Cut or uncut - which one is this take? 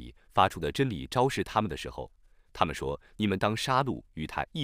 uncut